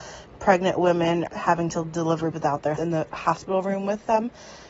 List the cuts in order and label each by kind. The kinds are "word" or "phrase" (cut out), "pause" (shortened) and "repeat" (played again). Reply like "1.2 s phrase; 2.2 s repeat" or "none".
1.3 s word; 2.3 s word; 2.8 s word